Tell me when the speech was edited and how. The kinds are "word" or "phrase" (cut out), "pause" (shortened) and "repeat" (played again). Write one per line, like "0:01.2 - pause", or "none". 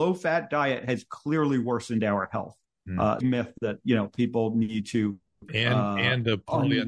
0:03.2 - phrase
0:05.5 - word